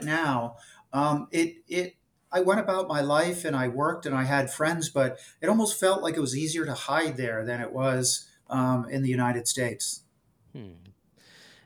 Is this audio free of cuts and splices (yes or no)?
yes